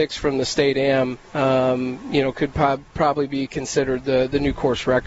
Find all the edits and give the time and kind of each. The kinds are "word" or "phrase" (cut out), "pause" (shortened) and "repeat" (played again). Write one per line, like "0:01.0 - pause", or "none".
0:01.3 - pause
0:02.9 - pause